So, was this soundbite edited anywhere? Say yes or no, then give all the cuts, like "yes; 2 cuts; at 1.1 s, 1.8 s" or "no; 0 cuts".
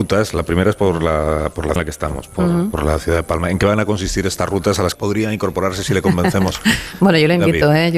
yes; 2 cuts; at 1.8 s, 4.9 s